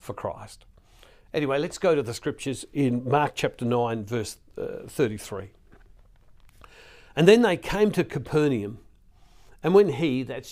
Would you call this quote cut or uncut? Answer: uncut